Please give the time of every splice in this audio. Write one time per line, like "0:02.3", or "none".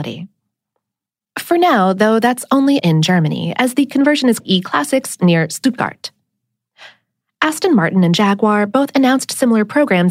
0:02.8
0:04.4